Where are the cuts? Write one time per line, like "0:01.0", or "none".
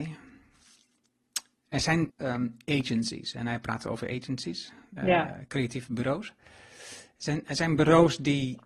0:02.1
0:05.0